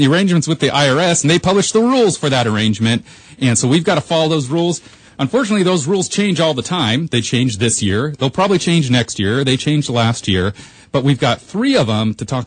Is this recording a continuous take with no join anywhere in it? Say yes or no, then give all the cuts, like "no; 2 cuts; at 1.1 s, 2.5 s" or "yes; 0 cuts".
yes; 0 cuts